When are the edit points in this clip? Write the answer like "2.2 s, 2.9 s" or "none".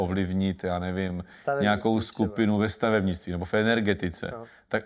none